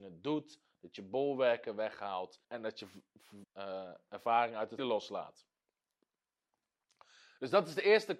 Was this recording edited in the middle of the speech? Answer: yes; 3 cuts; at 2.4 s, 3.4 s, 4.8 s

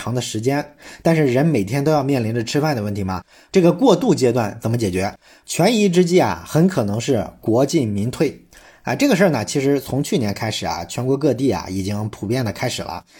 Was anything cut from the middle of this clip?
no; 0 cuts

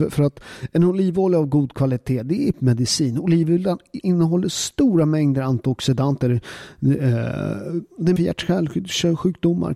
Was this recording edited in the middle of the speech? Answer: yes; 3 cuts; at 2.5 s, 4.0 s, 8.2 s

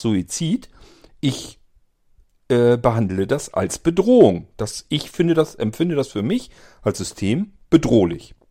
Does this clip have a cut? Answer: no; 0 cuts

